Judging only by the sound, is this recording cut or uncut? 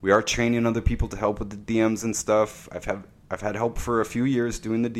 uncut